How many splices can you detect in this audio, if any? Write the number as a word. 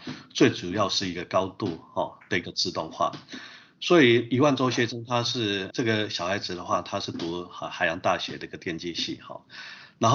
one